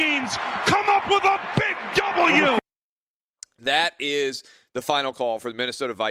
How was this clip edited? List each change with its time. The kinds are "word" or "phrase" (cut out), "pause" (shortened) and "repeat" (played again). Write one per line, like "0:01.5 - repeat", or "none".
none